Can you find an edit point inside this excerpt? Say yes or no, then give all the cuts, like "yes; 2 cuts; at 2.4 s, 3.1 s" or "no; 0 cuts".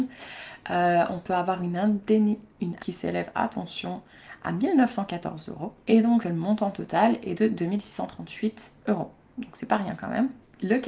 yes; 4 cuts; at 2.8 s, 5.8 s, 6.2 s, 8.8 s